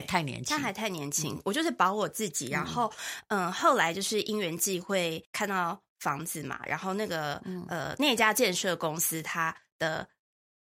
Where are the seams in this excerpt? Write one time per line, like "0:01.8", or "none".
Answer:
0:05.2